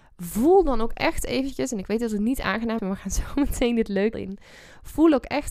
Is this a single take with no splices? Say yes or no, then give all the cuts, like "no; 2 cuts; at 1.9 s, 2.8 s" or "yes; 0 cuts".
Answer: no; 2 cuts; at 2.8 s, 4.1 s